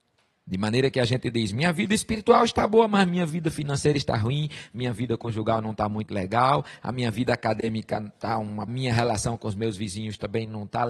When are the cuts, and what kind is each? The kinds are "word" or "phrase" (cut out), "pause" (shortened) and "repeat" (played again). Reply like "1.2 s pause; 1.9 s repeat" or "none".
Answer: 8.7 s phrase